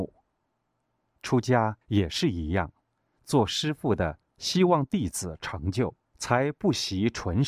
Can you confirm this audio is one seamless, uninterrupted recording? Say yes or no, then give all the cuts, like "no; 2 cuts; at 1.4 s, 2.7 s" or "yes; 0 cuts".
no; 4 cuts; at 1.8 s, 3.0 s, 4.3 s, 6.0 s